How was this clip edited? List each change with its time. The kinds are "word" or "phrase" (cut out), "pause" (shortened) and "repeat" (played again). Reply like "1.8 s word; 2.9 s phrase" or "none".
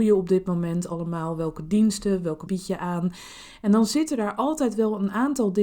2.5 s word